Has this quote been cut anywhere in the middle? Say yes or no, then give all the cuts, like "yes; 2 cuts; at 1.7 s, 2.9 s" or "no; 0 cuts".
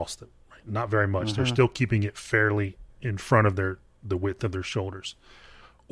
no; 0 cuts